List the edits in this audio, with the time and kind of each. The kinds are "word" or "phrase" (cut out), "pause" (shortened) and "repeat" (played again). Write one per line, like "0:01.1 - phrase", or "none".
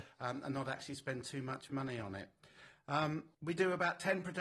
0:03.3 - pause